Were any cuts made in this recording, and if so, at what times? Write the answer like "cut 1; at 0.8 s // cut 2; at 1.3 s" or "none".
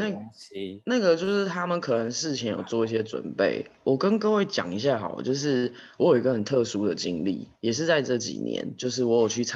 cut 1; at 7.6 s